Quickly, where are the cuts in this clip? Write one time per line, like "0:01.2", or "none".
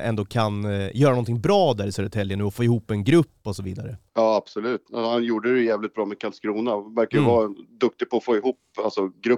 0:04.1